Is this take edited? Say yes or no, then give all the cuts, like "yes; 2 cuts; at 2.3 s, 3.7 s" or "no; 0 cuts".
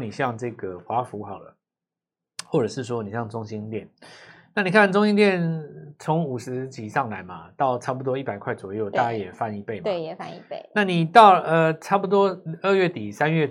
no; 0 cuts